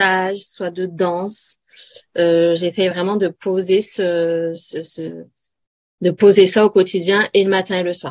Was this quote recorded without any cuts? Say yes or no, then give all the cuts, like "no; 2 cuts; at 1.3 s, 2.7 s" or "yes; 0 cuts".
yes; 0 cuts